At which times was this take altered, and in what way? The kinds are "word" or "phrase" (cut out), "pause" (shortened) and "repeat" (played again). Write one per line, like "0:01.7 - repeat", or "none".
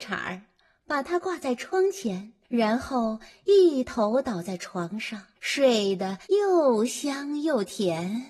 0:02.4 - pause
0:05.4 - pause
0:06.2 - pause